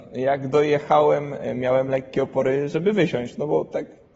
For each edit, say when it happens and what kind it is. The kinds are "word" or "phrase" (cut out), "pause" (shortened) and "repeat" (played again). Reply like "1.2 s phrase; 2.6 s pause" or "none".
none